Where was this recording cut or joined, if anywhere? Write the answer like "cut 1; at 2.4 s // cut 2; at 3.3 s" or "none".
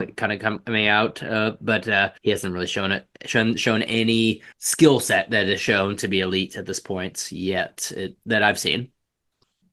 cut 1; at 2.2 s // cut 2; at 4.5 s